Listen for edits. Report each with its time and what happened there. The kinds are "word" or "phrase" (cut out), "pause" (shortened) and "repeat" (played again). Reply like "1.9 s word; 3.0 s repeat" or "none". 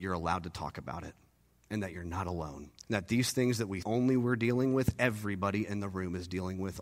2.8 s pause; 3.8 s word